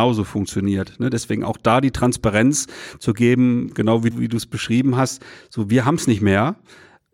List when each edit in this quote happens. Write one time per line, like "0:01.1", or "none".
0:04.1